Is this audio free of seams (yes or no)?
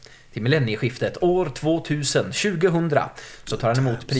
yes